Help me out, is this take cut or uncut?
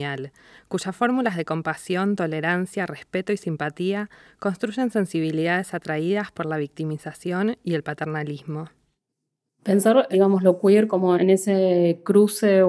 uncut